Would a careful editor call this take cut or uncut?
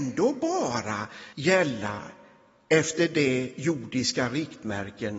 cut